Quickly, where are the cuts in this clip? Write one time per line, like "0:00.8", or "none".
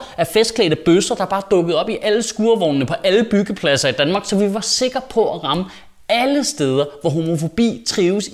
none